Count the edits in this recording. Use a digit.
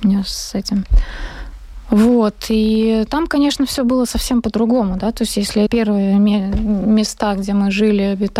1